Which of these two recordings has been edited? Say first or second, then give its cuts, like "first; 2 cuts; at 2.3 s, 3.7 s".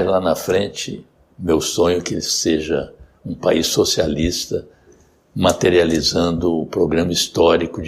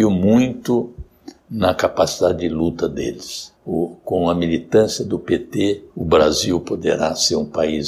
second; 2 cuts; at 3.5 s, 5.9 s